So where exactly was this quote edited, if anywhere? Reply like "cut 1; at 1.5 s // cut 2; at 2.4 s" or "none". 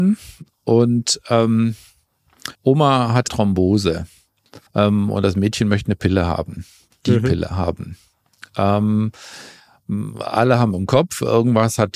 cut 1; at 2.5 s // cut 2; at 3.3 s // cut 3; at 4.7 s